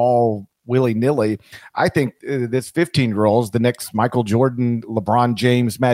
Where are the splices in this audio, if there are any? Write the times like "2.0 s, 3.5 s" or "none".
none